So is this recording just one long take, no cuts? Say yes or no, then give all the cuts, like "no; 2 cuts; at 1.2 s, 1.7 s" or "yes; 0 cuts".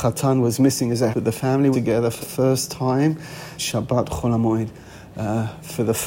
no; 4 cuts; at 1.1 s, 1.7 s, 2.2 s, 3.6 s